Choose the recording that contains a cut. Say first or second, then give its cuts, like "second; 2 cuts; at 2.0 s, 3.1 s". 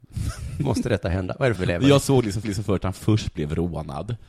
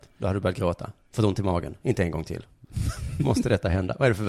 first; 2 cuts; at 1.6 s, 2.4 s